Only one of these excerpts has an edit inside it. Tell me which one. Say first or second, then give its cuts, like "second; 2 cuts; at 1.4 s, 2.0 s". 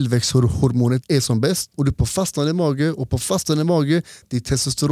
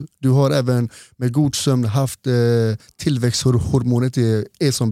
first; 2 cuts; at 1.0 s, 1.7 s